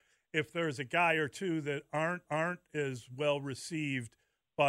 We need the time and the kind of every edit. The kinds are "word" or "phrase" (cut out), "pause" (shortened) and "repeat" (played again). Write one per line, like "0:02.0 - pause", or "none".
0:02.3 - repeat